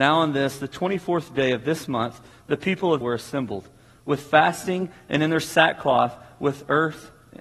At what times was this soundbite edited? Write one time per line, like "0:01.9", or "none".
0:03.0